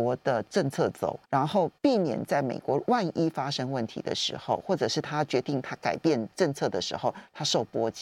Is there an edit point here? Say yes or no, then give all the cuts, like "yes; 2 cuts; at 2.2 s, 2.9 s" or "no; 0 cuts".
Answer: yes; 2 cuts; at 1.2 s, 1.8 s